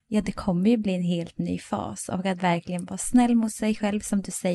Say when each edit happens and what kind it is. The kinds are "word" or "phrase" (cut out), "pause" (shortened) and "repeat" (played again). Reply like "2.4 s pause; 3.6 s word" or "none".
none